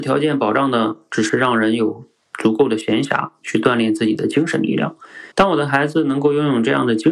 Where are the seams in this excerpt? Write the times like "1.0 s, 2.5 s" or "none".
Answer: 5.3 s